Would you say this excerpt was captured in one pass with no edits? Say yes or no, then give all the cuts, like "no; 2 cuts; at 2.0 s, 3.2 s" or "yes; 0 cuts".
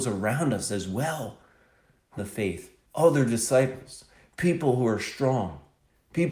no; 2 cuts; at 2.2 s, 2.9 s